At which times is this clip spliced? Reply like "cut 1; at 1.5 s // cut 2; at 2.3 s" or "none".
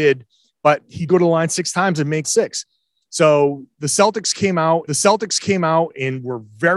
cut 1; at 1.1 s // cut 2; at 2.2 s // cut 3; at 4.9 s